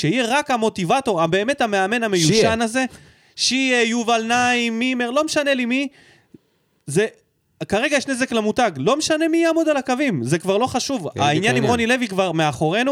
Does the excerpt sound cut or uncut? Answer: uncut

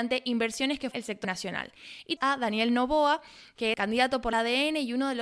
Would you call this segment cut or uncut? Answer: cut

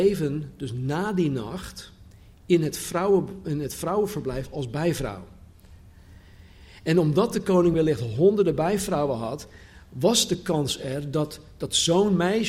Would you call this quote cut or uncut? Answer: uncut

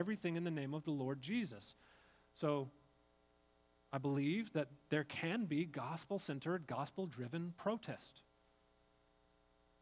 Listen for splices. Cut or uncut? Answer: uncut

